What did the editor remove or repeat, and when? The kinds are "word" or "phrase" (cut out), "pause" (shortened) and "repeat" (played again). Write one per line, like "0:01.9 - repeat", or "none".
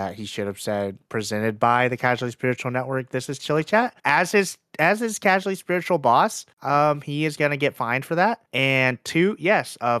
0:04.0 - pause
0:06.5 - pause
0:08.5 - pause